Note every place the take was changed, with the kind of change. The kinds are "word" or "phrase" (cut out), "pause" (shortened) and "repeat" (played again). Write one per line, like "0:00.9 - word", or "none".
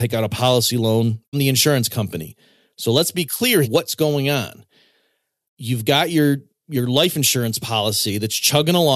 0:01.3 - word
0:03.6 - word

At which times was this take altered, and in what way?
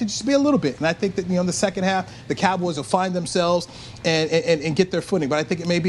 none

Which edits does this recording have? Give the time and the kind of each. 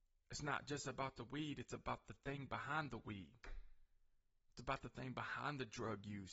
none

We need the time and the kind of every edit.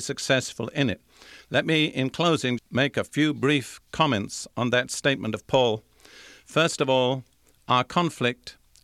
0:02.6 - word

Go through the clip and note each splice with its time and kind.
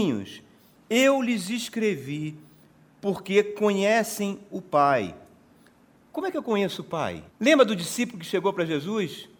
0:07.3 - pause

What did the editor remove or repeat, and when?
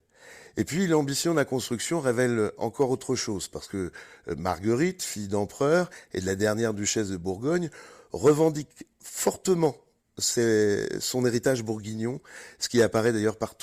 none

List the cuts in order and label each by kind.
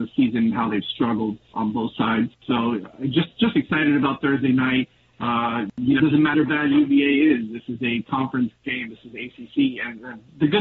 0:01.5 - word
0:06.0 - word
0:06.3 - phrase

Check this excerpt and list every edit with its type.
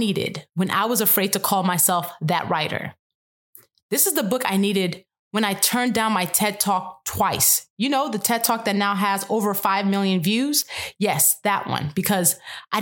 none

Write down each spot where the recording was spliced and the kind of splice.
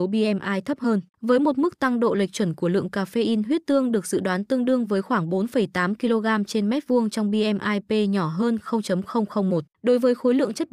0:01.1 - pause
0:09.7 - pause

